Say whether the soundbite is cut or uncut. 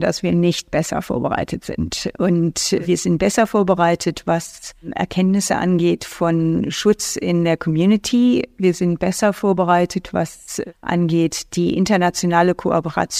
uncut